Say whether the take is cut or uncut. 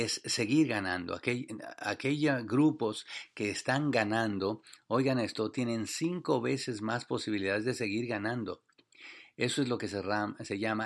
uncut